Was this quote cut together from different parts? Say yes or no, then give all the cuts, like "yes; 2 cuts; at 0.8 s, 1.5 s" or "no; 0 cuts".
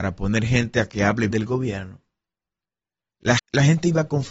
yes; 2 cuts; at 1.3 s, 3.4 s